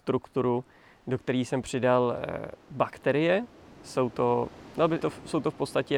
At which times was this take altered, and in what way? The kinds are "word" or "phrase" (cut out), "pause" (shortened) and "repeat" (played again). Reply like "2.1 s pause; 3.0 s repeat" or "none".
1.6 s word; 5.0 s word